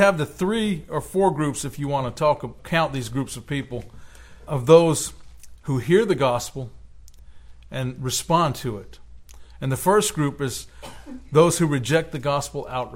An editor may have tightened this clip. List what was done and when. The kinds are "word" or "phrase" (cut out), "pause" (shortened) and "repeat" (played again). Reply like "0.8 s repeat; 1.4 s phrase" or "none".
2.6 s word; 4.5 s word